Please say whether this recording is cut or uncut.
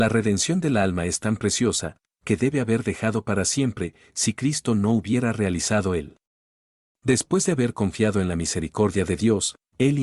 uncut